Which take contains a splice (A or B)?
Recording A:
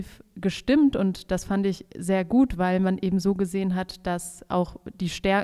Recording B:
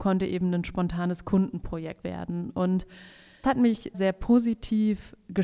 B